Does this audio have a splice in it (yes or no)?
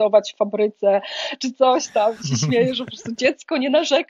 no